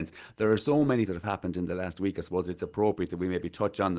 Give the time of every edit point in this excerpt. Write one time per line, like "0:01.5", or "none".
0:01.1